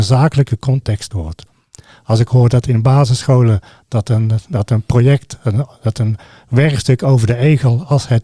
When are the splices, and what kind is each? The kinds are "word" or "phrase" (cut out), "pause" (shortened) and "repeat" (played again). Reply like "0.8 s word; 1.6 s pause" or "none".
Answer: 1.1 s word